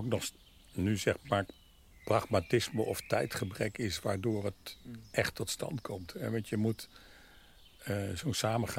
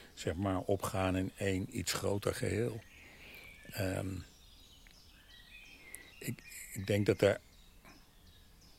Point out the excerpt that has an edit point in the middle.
second; 1 cut; at 6.1 s

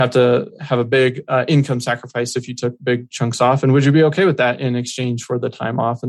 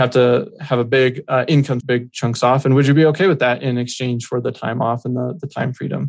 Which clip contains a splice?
second; 1 cut; at 1.8 s

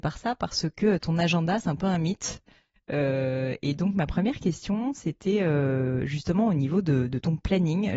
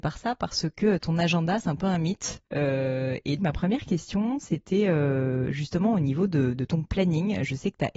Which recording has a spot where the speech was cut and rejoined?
second; 2 cuts; at 2.5 s, 3.4 s

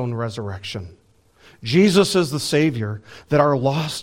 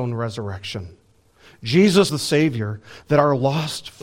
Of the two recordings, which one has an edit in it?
second; 1 cut; at 2.1 s

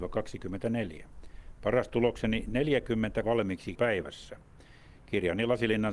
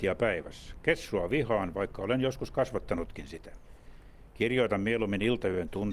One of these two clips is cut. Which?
first; 2 cuts; at 3.2 s, 3.7 s

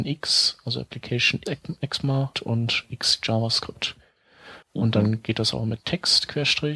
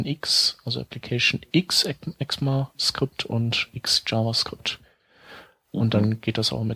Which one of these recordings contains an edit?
first; 3 cuts; at 1.5 s, 2.3 s, 4.6 s

